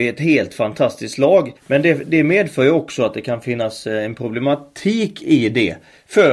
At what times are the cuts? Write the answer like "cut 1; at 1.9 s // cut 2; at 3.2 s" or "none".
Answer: cut 1; at 1.6 s